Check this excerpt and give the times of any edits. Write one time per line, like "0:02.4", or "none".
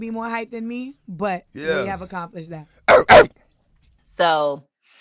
none